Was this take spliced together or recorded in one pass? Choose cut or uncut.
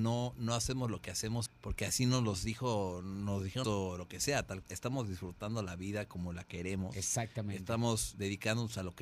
cut